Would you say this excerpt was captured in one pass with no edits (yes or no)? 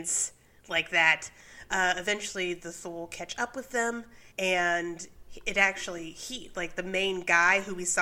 no